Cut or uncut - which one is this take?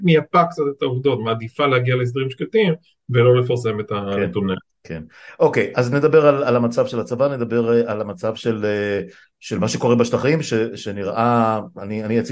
uncut